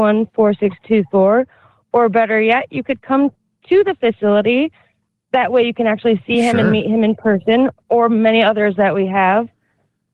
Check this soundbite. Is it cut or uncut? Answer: uncut